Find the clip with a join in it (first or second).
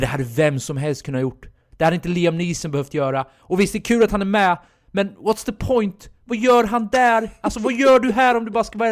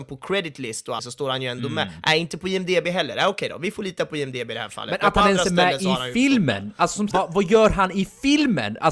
second